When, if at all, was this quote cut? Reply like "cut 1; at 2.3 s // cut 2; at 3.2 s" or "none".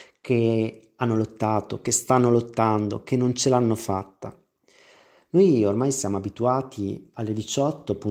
none